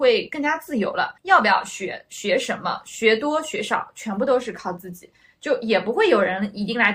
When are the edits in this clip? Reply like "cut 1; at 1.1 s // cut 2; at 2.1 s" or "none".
cut 1; at 1.2 s